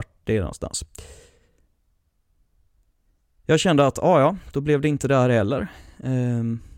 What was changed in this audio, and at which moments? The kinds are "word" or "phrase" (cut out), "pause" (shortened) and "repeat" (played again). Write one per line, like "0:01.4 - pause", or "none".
none